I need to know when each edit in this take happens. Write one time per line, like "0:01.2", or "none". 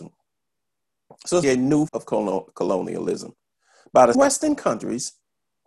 0:01.4
0:01.9
0:04.1